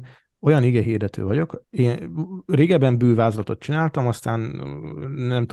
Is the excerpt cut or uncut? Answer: uncut